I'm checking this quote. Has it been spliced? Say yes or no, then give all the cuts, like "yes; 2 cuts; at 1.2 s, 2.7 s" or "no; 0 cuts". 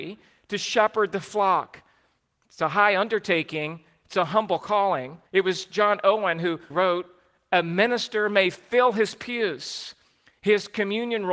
yes; 2 cuts; at 5.3 s, 6.7 s